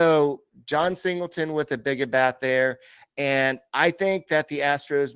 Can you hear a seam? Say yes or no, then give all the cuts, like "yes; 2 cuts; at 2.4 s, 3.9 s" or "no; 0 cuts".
no; 0 cuts